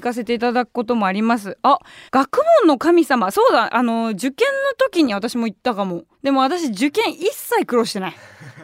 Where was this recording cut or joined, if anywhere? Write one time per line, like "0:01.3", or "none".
0:02.1
0:06.1

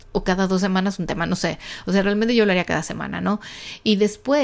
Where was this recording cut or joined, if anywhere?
none

